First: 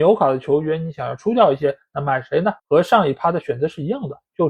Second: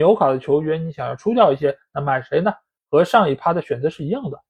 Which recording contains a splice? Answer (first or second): first